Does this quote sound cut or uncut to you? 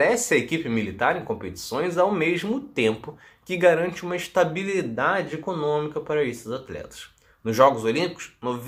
uncut